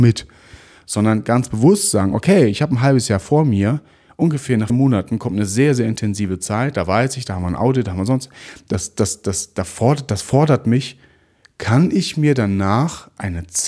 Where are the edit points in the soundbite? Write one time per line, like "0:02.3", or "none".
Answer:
0:04.7